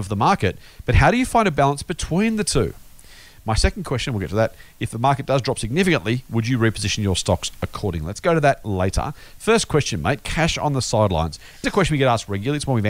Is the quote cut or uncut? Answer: cut